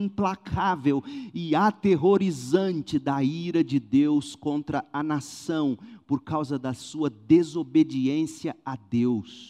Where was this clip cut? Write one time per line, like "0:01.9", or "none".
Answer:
none